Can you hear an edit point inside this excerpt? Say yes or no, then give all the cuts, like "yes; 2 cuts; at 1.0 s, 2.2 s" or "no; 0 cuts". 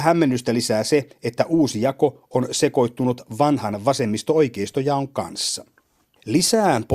no; 0 cuts